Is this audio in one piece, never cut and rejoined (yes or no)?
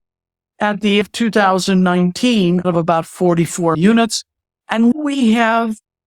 no